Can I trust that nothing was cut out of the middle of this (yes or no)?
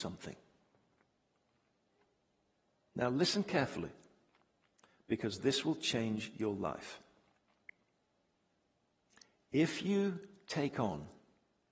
yes